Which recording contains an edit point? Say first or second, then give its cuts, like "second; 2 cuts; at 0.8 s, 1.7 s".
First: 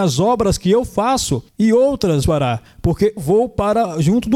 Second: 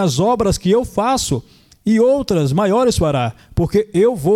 first; 3 cuts; at 1.5 s, 2.2 s, 3.2 s